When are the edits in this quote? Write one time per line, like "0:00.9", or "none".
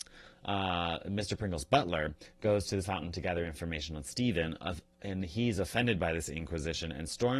0:02.8

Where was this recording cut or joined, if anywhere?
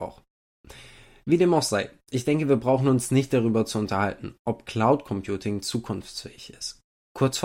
none

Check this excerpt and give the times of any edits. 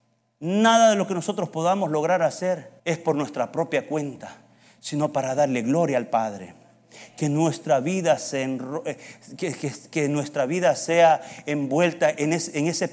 0:02.8

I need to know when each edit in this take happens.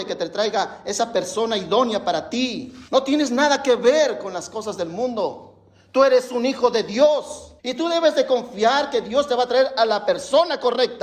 0:02.9
0:07.6

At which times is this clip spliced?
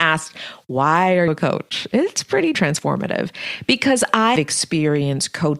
0:01.3
0:02.5
0:04.4

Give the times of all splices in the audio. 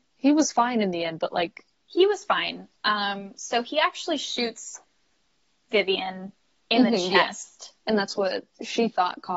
none

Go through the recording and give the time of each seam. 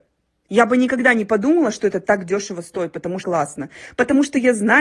0:03.2

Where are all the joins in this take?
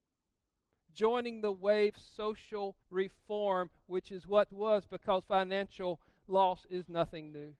0:01.9
0:02.8
0:04.5
0:05.2

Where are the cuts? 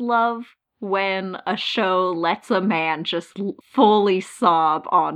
0:03.6

